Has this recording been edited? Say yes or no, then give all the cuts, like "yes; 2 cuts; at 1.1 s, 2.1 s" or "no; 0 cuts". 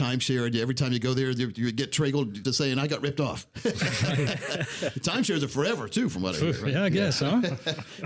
yes; 1 cut; at 2.4 s